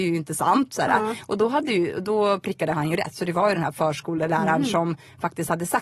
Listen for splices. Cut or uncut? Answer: uncut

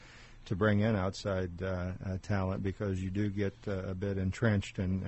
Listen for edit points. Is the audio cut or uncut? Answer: uncut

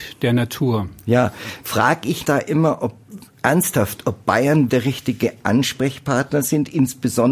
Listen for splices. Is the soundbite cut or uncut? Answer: cut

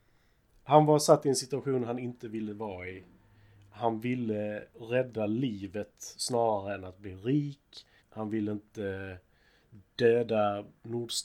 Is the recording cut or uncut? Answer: cut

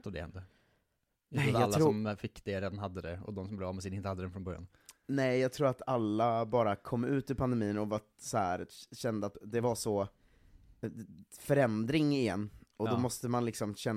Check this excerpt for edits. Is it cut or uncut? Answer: uncut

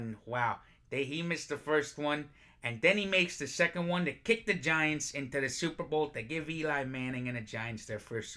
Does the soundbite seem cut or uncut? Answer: uncut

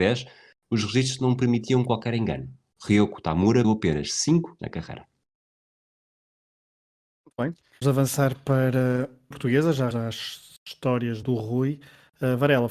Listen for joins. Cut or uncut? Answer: cut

